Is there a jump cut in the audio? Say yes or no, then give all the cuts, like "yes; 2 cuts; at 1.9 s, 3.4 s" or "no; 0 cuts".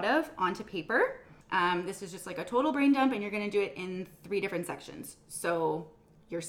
yes; 1 cut; at 1.4 s